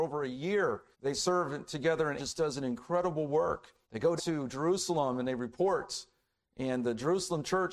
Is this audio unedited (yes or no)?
no